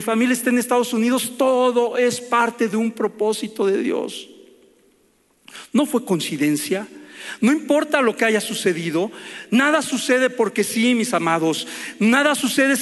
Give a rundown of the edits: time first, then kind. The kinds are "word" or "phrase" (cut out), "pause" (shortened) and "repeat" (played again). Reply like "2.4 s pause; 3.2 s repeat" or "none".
none

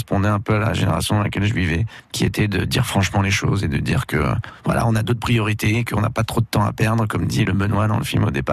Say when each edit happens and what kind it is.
7.5 s phrase

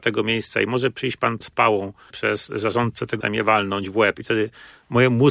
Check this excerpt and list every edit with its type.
1.4 s word; 2.1 s word; 3.2 s word

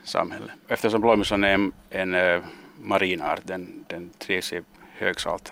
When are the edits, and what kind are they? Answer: none

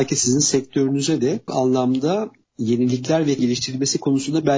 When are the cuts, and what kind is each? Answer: 1.5 s word; 3.4 s word

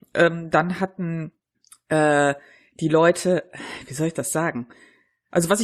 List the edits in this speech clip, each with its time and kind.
1.5 s pause

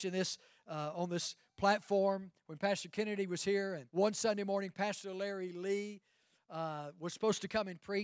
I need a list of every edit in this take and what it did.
3.9 s pause

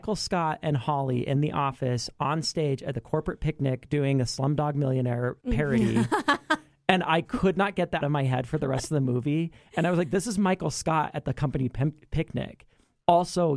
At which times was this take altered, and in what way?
5.4 s pause; 8.0 s word

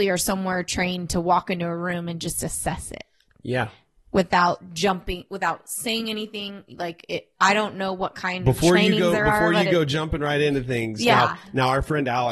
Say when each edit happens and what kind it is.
none

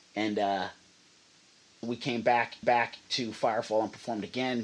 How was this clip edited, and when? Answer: 1.8 s word; 2.6 s repeat

